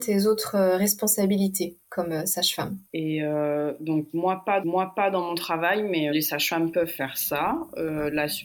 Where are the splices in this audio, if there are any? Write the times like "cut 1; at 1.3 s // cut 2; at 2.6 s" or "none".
cut 1; at 2.9 s // cut 2; at 4.6 s // cut 3; at 6.1 s